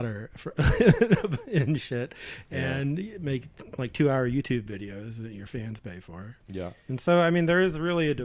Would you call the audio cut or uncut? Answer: cut